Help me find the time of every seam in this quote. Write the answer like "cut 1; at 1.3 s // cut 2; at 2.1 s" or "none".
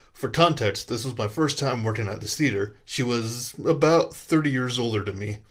none